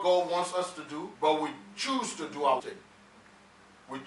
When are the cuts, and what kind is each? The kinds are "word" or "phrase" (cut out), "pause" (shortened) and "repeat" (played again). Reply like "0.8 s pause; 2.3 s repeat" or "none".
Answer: 1.1 s pause; 2.6 s word